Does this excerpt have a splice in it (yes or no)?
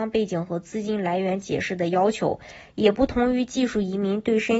no